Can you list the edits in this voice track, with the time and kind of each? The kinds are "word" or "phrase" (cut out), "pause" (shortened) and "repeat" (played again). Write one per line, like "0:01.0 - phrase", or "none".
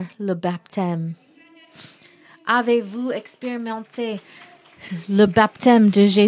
none